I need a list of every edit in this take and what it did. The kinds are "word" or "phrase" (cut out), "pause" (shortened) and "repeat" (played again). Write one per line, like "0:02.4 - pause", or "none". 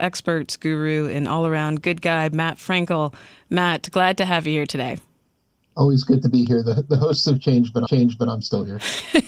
0:07.9 - repeat